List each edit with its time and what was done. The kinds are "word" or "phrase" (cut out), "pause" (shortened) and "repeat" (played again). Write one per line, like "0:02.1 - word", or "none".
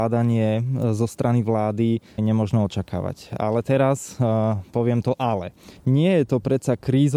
0:02.2 - word
0:05.8 - pause